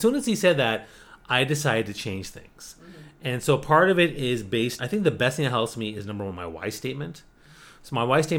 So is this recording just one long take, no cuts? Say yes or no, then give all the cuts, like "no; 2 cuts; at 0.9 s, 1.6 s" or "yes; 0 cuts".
no; 1 cut; at 4.8 s